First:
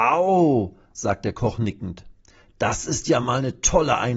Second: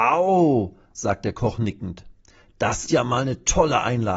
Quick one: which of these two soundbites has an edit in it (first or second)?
second